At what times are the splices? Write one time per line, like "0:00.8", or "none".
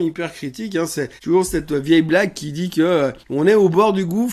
0:01.2
0:03.2